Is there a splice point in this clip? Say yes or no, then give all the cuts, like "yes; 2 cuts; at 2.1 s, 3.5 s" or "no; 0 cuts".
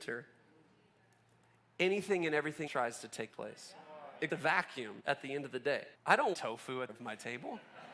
yes; 7 cuts; at 2.7 s, 3.3 s, 4.3 s, 5.0 s, 5.9 s, 6.3 s, 6.9 s